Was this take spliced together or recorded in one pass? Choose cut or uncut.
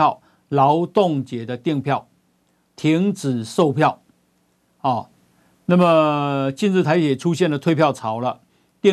uncut